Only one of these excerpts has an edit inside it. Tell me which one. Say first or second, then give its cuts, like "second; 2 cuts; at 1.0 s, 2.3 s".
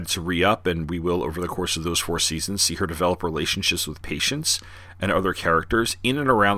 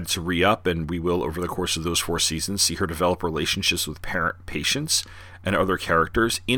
first; 1 cut; at 4.0 s